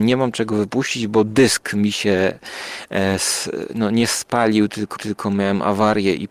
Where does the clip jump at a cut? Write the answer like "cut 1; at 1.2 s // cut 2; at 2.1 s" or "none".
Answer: cut 1; at 5.0 s